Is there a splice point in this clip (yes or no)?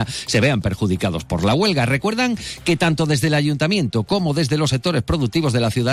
no